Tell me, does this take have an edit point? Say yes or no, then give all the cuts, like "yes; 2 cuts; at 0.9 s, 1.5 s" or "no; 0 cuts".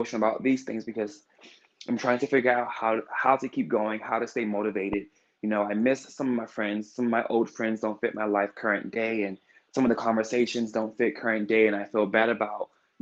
no; 0 cuts